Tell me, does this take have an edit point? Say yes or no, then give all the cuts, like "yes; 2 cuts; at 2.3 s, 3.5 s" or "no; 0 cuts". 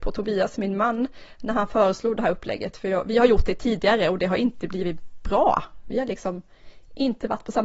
no; 0 cuts